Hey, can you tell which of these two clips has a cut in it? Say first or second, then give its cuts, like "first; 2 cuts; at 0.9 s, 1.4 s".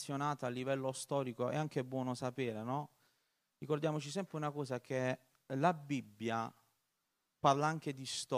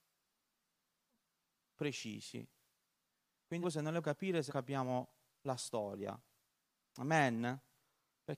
second; 3 cuts; at 3.6 s, 4.0 s, 4.5 s